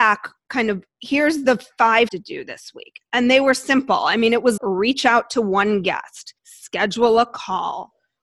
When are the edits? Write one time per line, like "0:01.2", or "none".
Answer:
0:02.1
0:04.6
0:06.4